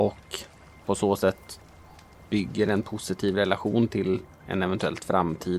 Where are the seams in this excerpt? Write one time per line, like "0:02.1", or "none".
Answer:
none